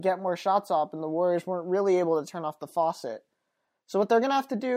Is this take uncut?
yes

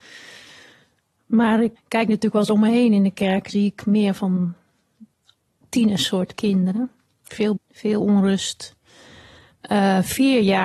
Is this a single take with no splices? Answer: no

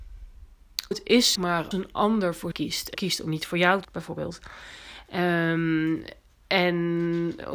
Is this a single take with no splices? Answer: no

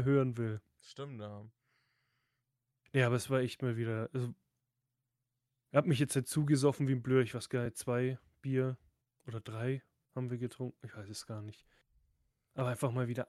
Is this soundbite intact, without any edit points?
yes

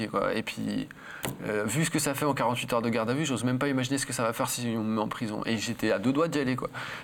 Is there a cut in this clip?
no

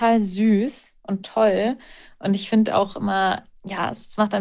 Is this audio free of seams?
yes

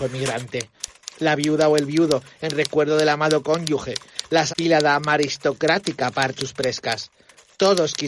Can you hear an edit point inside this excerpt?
yes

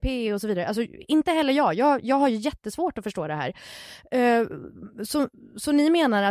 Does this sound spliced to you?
no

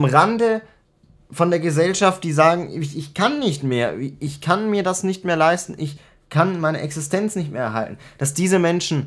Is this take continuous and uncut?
yes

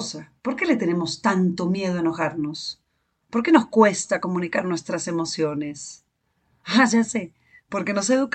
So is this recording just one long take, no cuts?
yes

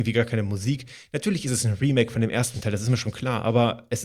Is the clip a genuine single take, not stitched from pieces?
yes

